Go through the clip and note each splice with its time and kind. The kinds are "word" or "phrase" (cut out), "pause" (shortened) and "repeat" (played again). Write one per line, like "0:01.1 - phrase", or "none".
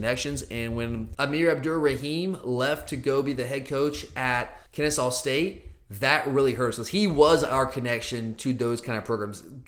0:04.7 - pause